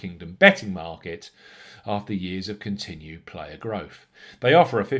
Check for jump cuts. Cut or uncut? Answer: uncut